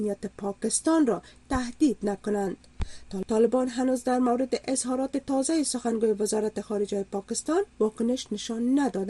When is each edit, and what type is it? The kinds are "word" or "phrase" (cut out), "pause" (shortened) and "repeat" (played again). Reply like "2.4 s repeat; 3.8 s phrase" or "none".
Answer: 7.7 s pause